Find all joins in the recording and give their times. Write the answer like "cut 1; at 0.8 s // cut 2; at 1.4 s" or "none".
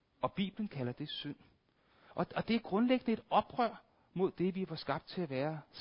none